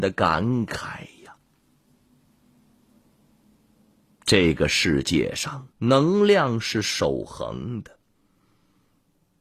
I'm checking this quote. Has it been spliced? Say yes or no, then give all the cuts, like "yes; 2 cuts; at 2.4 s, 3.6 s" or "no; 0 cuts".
yes; 1 cut; at 5.7 s